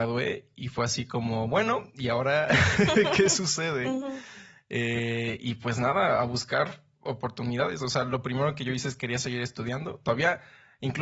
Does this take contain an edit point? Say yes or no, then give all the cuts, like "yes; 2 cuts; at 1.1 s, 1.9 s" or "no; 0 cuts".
no; 0 cuts